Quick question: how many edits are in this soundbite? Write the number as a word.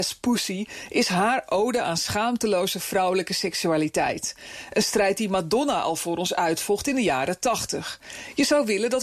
zero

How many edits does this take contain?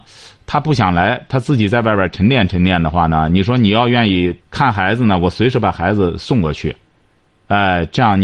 one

